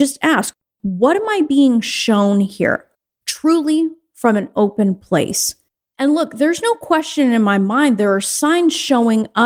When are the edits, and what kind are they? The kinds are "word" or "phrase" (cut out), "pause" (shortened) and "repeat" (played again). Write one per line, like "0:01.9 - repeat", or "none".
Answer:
none